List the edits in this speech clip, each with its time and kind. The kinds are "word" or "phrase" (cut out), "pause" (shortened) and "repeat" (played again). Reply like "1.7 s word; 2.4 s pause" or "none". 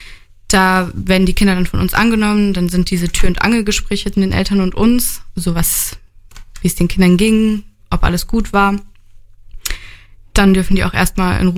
4.1 s word